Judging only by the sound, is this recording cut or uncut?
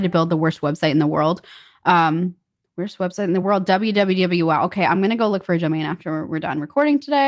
uncut